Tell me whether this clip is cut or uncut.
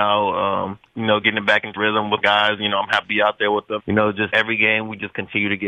cut